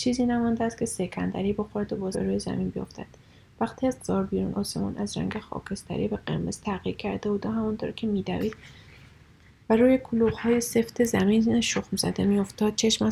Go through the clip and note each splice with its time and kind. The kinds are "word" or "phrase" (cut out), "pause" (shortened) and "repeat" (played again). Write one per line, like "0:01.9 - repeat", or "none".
0:02.1 - word
0:04.0 - word
0:04.5 - word